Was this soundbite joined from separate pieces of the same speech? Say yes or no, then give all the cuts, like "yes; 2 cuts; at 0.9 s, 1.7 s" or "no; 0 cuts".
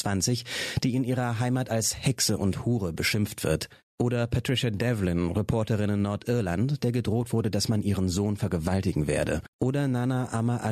yes; 1 cut; at 9.5 s